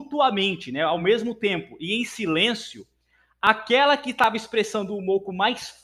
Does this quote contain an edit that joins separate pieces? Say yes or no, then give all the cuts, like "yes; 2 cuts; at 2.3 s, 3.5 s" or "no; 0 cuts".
no; 0 cuts